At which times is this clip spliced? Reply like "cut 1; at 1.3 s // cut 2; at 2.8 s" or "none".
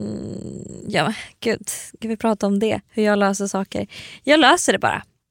none